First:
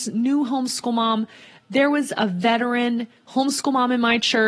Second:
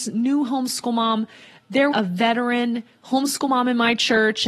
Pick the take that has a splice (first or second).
second